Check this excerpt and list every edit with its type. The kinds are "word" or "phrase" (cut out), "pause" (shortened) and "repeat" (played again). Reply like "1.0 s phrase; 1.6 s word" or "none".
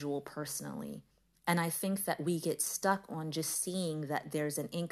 1.1 s pause

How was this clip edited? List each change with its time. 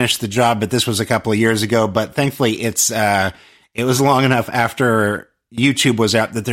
none

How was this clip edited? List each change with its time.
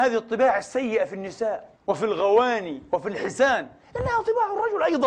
1.8 s pause

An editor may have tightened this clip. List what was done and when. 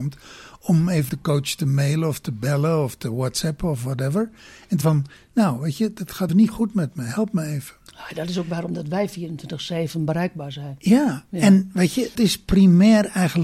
1.1 s word; 4.8 s word; 6.3 s word; 12.2 s word

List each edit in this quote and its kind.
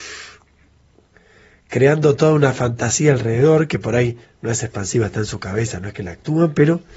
4.2 s pause

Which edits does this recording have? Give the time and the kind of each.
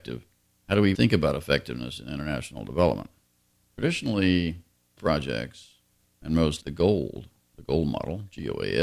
0.9 s word; 5.0 s word; 6.6 s phrase

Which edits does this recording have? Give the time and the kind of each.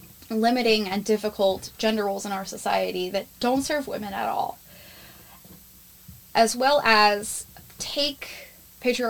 6.2 s pause

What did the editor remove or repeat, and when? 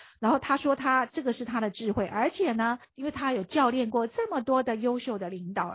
2.8 s pause

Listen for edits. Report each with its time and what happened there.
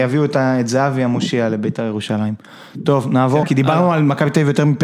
3.4 s word

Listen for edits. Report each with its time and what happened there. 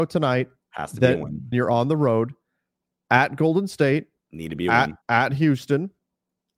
1.5 s word; 5.0 s pause

